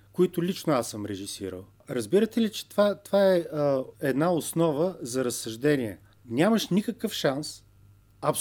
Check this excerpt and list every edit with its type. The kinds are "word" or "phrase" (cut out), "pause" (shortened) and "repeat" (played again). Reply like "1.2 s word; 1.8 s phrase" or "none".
3.9 s pause; 6.1 s pause